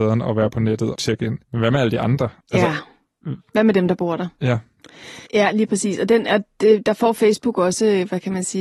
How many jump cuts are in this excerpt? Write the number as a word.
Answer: four